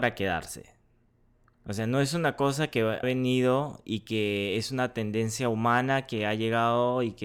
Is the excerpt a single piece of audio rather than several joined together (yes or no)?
no